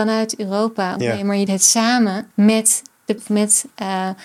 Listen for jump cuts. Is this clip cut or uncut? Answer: cut